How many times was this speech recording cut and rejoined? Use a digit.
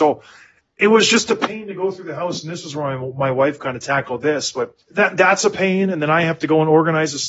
1